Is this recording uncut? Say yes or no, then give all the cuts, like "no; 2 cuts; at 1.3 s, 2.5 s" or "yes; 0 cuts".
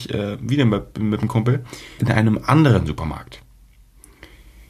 no; 1 cut; at 2.0 s